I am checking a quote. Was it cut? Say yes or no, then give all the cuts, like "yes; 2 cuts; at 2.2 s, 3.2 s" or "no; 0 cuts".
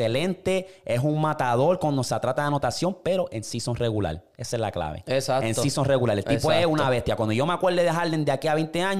no; 0 cuts